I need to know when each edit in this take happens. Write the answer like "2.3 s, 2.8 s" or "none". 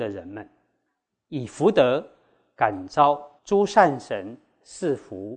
none